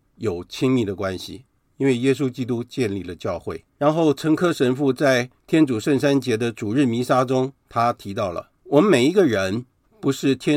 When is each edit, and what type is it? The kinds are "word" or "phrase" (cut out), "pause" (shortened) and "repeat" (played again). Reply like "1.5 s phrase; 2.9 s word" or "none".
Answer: 3.7 s pause; 5.4 s pause; 7.6 s pause; 8.6 s pause